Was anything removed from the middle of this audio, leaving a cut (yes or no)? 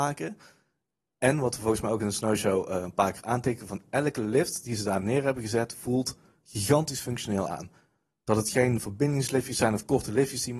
no